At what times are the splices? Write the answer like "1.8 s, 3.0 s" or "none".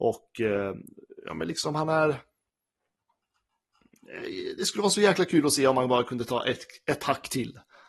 none